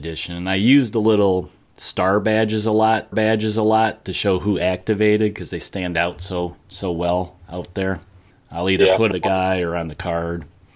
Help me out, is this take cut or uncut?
cut